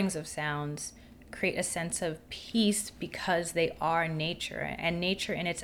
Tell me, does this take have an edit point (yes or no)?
no